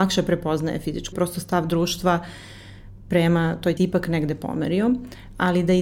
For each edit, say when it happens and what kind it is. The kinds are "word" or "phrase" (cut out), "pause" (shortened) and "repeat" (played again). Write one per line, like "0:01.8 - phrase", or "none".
0:01.1 - word
0:03.8 - phrase